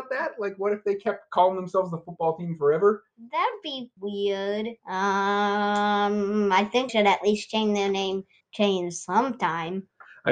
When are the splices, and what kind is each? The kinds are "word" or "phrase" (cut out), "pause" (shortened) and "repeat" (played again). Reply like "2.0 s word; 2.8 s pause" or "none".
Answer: 4.0 s word; 4.8 s pause; 6.9 s word; 8.4 s pause